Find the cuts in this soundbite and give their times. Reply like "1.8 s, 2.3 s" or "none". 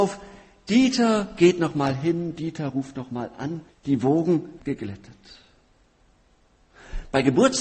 3.7 s, 4.6 s